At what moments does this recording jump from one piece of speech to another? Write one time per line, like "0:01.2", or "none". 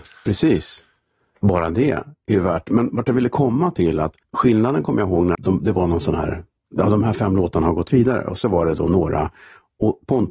0:04.2
0:05.3